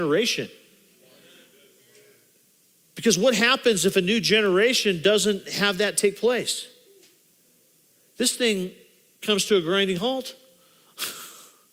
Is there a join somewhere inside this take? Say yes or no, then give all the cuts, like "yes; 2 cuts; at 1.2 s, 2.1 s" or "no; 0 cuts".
no; 0 cuts